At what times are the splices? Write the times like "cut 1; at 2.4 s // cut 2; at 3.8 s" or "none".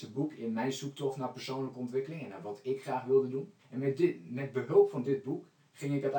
cut 1; at 3.6 s